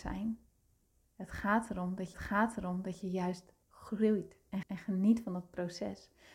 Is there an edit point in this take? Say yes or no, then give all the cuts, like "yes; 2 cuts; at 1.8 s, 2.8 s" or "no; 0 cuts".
yes; 3 cuts; at 2.1 s, 3.6 s, 4.6 s